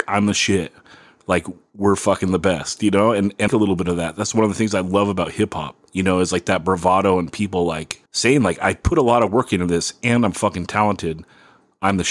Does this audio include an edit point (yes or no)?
yes